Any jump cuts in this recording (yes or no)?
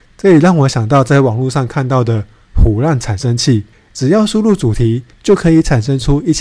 yes